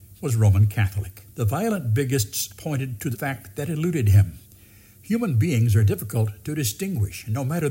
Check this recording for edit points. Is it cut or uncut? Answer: cut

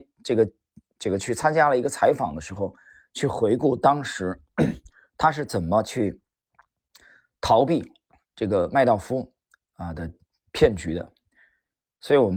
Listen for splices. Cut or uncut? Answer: uncut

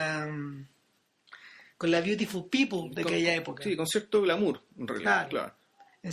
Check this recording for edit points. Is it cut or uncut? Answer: uncut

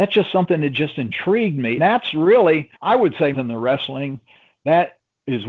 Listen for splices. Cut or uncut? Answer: cut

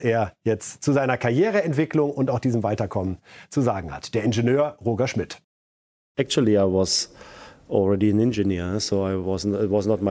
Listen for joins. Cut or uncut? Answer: uncut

